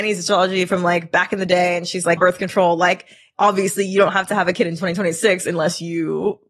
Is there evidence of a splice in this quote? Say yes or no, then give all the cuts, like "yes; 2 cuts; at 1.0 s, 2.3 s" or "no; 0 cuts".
yes; 1 cut; at 2.2 s